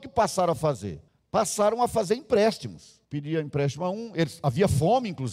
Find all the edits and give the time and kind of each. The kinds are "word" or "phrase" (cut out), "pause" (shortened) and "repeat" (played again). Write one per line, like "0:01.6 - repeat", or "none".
0:01.1 - pause
0:03.0 - pause